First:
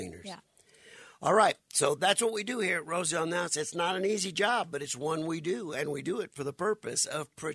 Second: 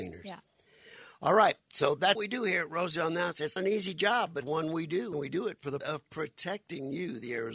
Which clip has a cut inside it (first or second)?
second